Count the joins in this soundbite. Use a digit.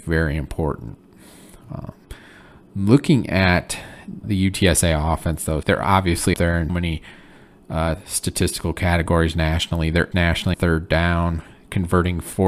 6